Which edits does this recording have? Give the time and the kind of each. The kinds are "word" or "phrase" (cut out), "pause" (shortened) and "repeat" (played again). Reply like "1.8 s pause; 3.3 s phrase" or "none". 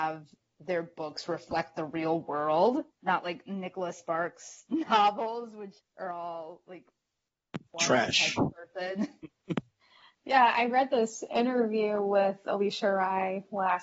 2.9 s pause; 5.8 s pause; 7.7 s pause